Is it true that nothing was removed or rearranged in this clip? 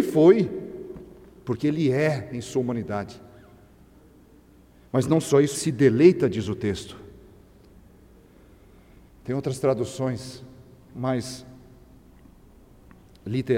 no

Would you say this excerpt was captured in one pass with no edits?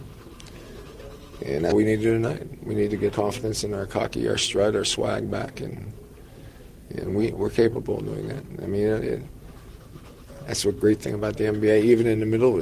no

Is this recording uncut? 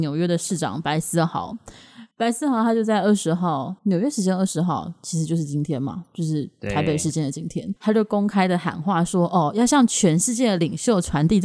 no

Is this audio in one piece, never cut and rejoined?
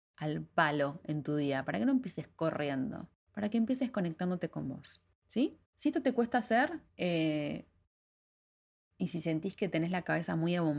no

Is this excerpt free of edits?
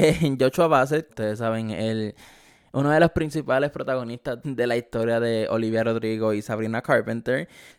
no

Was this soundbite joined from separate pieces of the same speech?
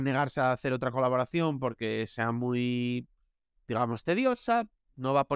no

